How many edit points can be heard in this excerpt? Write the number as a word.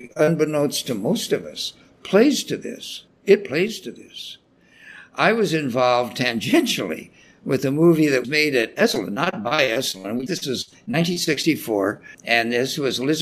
three